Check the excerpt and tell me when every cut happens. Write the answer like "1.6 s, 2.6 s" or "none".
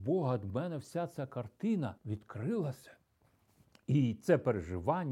2.0 s